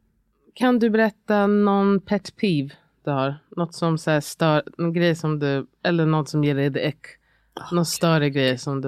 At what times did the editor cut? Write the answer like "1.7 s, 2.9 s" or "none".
none